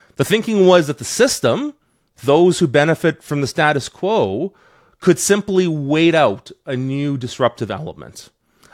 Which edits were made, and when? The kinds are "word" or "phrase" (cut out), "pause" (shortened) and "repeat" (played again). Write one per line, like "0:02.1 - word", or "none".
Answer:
none